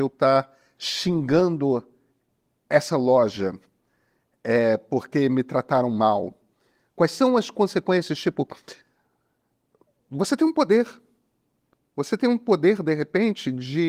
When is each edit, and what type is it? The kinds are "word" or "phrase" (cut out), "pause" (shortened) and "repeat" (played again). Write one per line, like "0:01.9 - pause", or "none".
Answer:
none